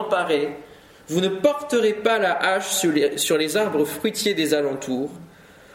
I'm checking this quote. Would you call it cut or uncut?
uncut